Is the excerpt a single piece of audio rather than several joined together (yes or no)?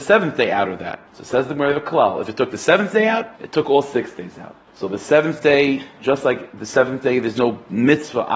no